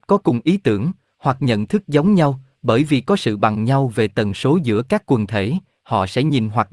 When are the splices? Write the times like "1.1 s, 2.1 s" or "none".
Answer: none